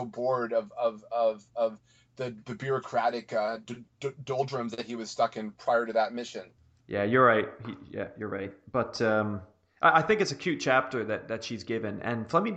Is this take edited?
no; 0 cuts

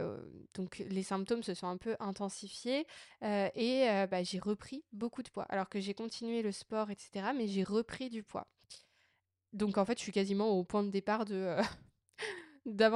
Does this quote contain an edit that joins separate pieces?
no; 0 cuts

